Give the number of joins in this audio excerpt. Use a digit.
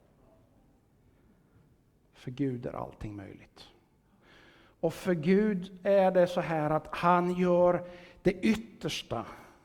0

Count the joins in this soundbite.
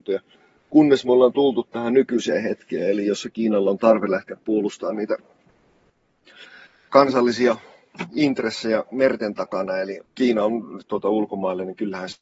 3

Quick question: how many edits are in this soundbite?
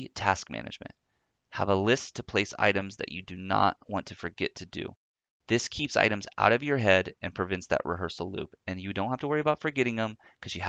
0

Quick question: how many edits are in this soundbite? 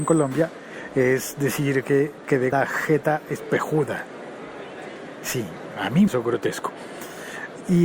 2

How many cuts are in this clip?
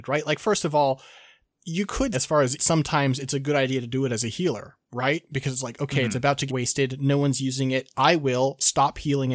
3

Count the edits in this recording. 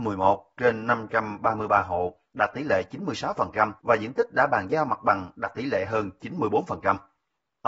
1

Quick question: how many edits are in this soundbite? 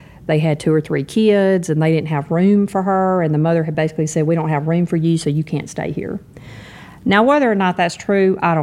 0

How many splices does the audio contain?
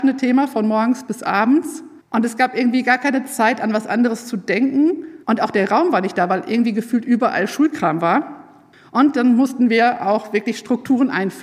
3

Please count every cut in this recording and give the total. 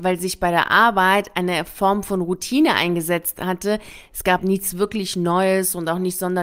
1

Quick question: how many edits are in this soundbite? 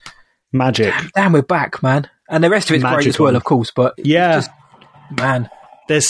0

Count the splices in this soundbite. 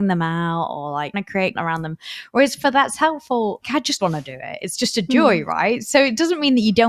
4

